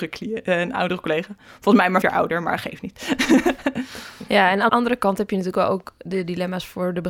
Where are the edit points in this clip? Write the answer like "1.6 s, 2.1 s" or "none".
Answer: 2.0 s, 4.7 s